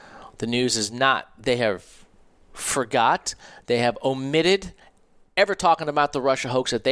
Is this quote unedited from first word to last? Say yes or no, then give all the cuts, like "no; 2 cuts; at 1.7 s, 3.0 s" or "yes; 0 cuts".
yes; 0 cuts